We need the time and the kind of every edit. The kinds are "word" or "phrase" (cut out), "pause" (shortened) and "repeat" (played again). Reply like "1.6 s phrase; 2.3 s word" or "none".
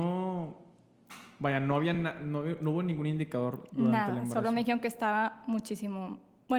none